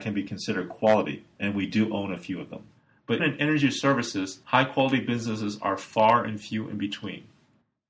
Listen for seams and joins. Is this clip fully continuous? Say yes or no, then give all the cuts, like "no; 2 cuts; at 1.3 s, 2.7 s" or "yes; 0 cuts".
no; 1 cut; at 3.2 s